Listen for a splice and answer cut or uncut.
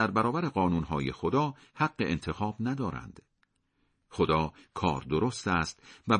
uncut